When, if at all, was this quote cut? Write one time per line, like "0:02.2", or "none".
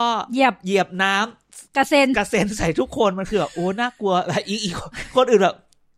0:01.7